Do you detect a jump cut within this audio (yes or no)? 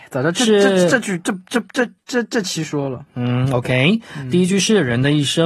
yes